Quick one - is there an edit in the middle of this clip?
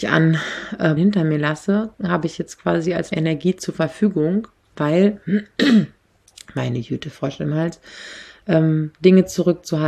yes; 4 cuts; at 1.0 s, 3.1 s, 4.6 s, 8.9 s

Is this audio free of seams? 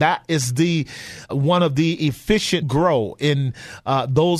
no; 2 cuts; at 1.3 s, 2.6 s

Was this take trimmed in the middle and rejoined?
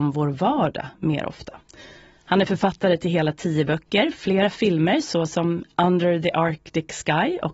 no; 0 cuts

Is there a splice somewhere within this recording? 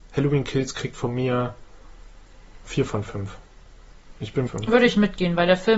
yes; 2 cuts; at 2.6 s, 4.5 s

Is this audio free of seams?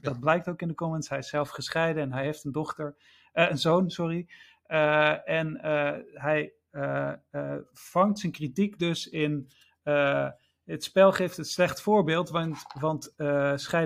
yes; 0 cuts

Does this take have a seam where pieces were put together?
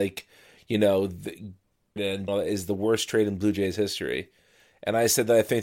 yes; 2 cuts; at 2.0 s, 2.3 s

